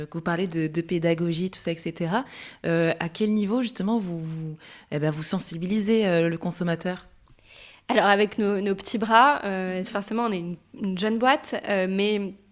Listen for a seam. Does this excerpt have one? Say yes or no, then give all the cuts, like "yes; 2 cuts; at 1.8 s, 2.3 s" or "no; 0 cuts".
no; 0 cuts